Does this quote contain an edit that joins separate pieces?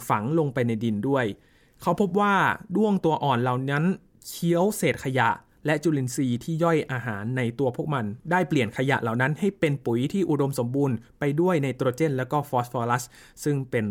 no; 0 cuts

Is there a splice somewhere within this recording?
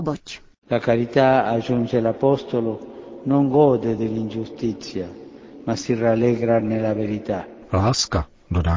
no; 0 cuts

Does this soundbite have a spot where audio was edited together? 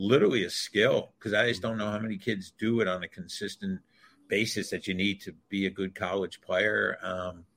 no; 0 cuts

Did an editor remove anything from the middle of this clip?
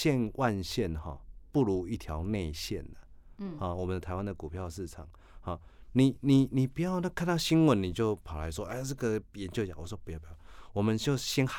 no; 0 cuts

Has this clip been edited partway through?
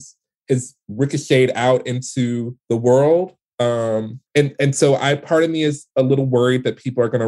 yes; 2 cuts; at 2.6 s, 4.3 s

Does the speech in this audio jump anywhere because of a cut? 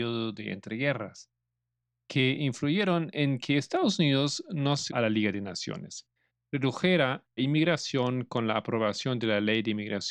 yes; 2 cuts; at 4.9 s, 7.4 s

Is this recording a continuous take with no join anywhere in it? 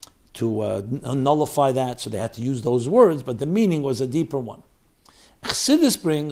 yes; 0 cuts

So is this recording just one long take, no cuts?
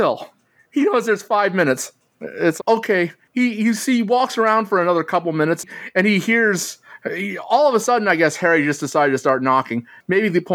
no; 1 cut; at 2.6 s

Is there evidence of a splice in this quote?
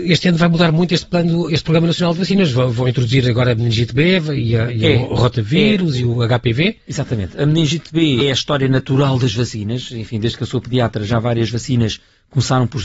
yes; 1 cut; at 8.2 s

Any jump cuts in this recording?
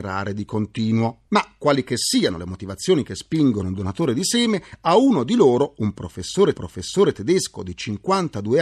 yes; 1 cut; at 6.5 s

